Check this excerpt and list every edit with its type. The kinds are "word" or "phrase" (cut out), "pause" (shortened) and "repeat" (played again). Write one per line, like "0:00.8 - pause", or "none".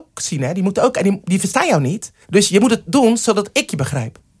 0:02.2 - pause